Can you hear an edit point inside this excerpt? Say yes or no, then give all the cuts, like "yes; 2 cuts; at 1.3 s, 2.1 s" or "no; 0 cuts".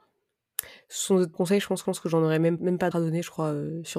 yes; 4 cuts; at 1.3 s, 1.8 s, 2.6 s, 2.9 s